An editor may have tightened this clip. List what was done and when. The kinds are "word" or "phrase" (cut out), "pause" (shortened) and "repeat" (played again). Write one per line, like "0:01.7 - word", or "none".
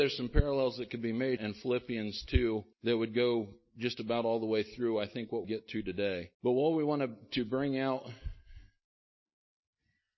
0:01.4 - phrase
0:02.7 - pause
0:05.4 - phrase
0:06.3 - pause

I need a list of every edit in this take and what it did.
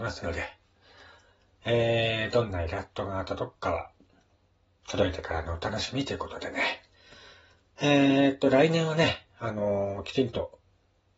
none

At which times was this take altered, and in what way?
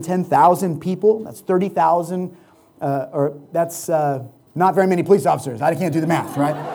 0:04.5 - pause

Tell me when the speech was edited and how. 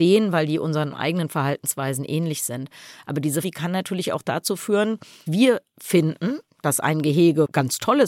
0:03.4 - word
0:05.3 - word

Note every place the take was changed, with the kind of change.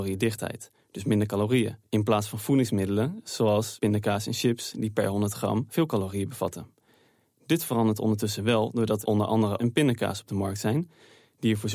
0:01.8 - pause
0:09.0 - word
0:09.6 - phrase

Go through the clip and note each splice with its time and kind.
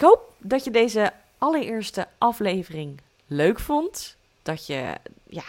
none

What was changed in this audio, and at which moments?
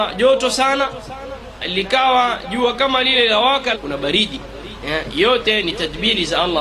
0:01.6 - word
0:03.7 - phrase

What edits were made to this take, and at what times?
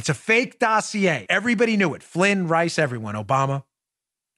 0:01.3 - word

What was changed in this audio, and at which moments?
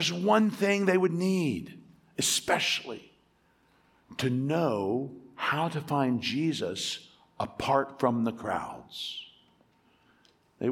none

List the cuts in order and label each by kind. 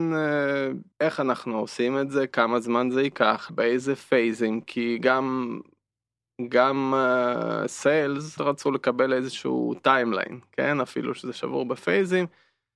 0:00.9 - pause
0:03.5 - word
0:08.4 - phrase

